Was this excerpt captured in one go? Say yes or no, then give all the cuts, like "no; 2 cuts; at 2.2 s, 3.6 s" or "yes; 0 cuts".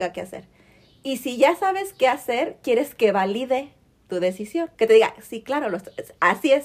no; 1 cut; at 4.7 s